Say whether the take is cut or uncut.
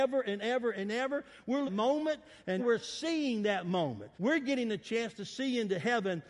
cut